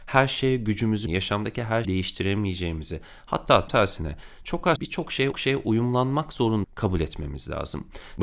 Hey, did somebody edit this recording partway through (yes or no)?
yes